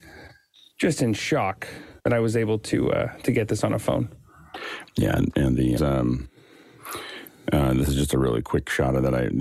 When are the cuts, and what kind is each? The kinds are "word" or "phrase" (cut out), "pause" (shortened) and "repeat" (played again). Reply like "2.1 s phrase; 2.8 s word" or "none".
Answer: 2.0 s pause; 5.8 s phrase